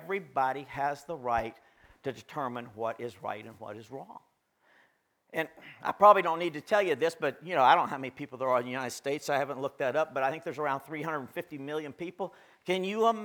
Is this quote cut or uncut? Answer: uncut